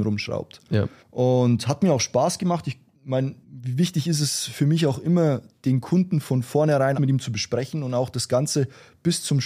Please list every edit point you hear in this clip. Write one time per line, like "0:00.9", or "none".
0:01.0
0:03.4
0:06.9